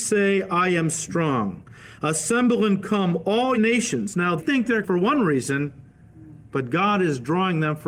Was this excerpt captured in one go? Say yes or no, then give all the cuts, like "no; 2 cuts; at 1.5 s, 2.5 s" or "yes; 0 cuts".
no; 3 cuts; at 3.5 s, 4.4 s, 4.8 s